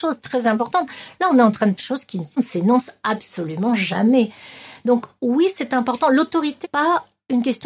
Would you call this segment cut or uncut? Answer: cut